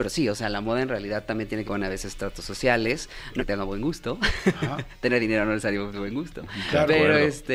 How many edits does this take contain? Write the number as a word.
two